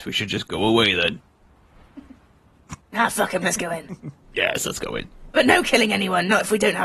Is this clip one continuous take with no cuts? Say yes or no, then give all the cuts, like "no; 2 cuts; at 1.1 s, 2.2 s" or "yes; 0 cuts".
yes; 0 cuts